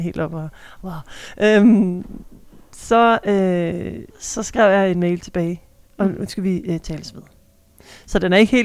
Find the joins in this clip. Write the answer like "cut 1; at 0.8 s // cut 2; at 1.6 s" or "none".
cut 1; at 4.1 s